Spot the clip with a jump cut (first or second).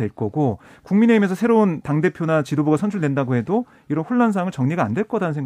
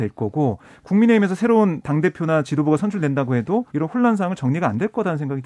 second